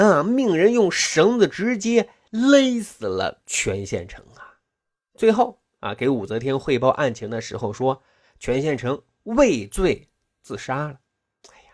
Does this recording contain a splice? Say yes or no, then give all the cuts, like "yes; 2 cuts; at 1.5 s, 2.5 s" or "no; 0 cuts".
no; 0 cuts